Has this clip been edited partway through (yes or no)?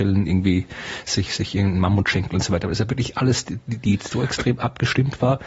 no